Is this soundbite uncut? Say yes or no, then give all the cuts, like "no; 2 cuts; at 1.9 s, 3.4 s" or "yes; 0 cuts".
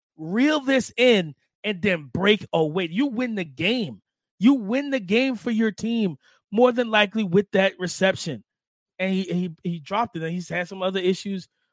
yes; 0 cuts